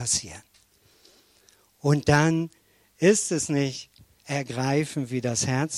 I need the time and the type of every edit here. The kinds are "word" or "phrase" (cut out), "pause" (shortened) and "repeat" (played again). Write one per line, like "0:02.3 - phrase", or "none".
none